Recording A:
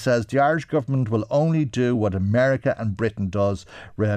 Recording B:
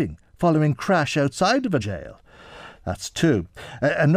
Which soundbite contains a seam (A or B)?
B